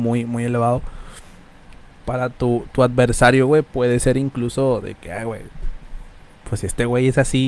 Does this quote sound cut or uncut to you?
uncut